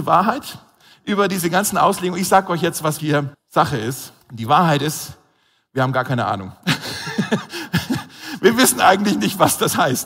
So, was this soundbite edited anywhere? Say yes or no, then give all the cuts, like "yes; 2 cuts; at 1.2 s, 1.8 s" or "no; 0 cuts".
yes; 3 cuts; at 3.0 s, 3.3 s, 4.2 s